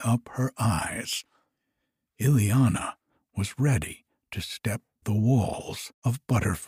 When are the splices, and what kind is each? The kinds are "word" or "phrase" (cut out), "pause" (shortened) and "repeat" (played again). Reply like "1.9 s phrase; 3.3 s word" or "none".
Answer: 5.0 s word